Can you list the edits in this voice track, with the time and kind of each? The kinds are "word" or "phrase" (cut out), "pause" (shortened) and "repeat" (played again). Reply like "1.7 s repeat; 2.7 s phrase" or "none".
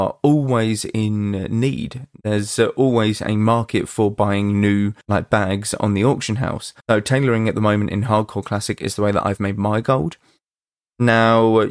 5.0 s pause; 6.8 s pause

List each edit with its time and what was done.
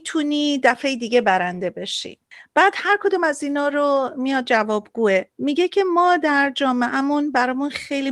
5.3 s pause

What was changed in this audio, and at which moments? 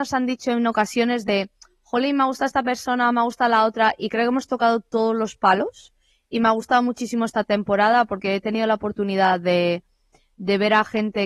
none

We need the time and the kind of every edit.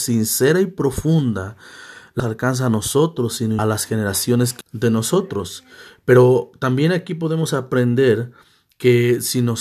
2.2 s phrase; 3.6 s phrase; 4.6 s phrase

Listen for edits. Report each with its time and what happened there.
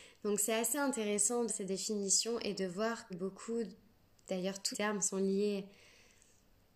1.5 s word; 3.1 s word; 4.7 s word

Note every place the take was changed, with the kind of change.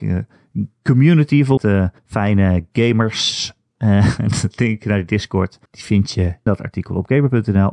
1.6 s word; 2.0 s pause; 5.7 s pause; 6.5 s word

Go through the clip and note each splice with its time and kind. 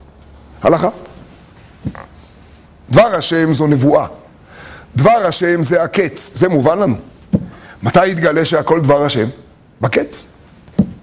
none

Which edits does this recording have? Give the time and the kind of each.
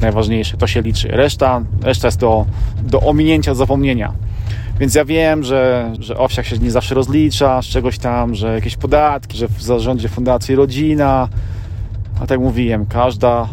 2.8 s word; 6.0 s word; 9.3 s word

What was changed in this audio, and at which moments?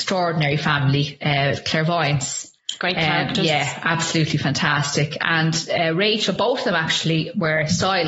none

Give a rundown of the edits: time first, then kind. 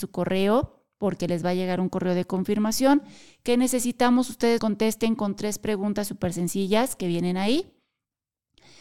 4.6 s word

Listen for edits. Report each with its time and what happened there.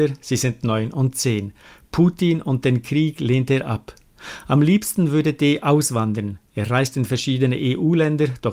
none

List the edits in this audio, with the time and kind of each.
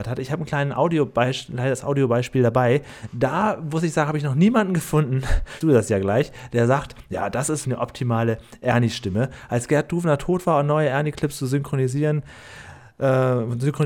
5.6 s phrase; 7.6 s word

